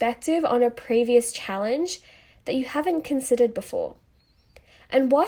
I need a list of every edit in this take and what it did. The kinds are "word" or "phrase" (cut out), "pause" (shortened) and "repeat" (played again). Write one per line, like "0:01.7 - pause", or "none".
none